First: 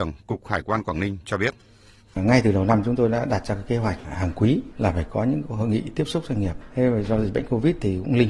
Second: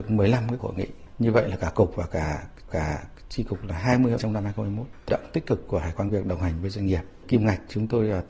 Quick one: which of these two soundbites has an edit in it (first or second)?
second